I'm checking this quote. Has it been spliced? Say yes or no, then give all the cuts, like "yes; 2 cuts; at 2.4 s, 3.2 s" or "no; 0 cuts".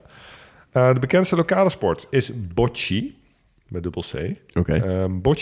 no; 0 cuts